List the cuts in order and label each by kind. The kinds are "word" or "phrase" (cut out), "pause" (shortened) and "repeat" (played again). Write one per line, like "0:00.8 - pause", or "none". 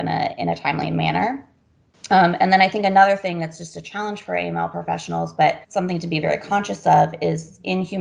0:05.6 - pause